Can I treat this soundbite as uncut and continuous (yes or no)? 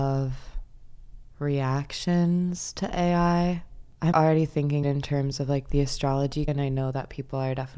no